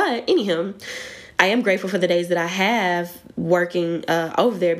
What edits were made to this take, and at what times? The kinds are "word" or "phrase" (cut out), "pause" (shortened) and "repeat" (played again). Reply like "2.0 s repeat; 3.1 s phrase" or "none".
none